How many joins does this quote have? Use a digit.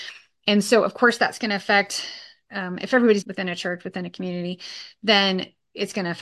1